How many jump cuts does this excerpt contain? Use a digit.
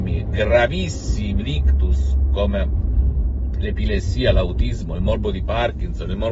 1